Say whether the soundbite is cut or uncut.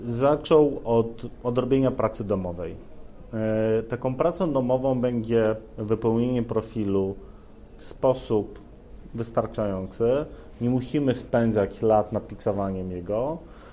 uncut